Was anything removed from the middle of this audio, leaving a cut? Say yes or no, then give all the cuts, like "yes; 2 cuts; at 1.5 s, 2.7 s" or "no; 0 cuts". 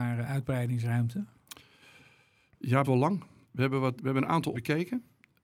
yes; 4 cuts; at 2.8 s, 3.4 s, 4.0 s, 4.5 s